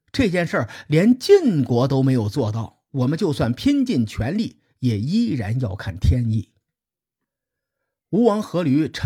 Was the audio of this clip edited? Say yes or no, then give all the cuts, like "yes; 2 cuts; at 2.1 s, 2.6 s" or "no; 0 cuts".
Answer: no; 0 cuts